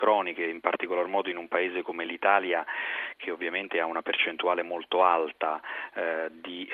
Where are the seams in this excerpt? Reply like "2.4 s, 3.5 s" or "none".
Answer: none